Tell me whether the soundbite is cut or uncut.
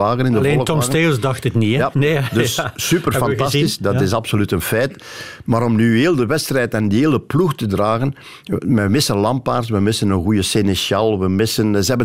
uncut